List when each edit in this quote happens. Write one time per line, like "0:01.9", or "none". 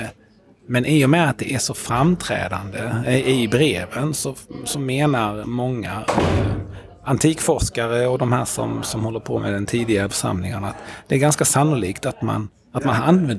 0:10.1